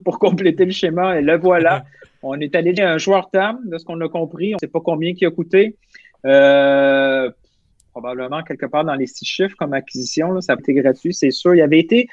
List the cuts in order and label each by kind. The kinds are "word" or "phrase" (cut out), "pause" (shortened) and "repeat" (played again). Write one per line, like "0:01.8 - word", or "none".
0:02.8 - word
0:10.6 - word